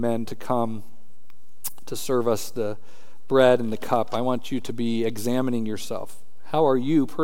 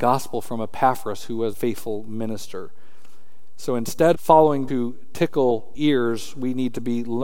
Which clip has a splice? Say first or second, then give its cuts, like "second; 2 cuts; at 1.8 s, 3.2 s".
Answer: second; 4 cuts; at 1.5 s, 4.1 s, 4.7 s, 5.7 s